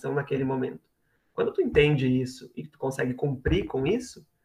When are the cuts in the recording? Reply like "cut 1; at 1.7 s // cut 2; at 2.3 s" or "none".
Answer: none